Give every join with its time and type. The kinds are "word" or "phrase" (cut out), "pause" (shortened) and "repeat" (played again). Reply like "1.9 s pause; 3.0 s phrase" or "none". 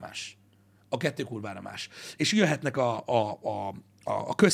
none